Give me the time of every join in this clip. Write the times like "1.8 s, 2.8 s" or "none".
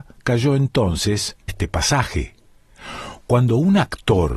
1.5 s